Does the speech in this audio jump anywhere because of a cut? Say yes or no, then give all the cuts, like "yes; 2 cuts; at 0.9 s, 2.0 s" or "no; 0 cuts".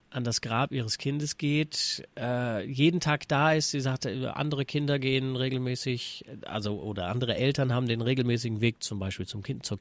no; 0 cuts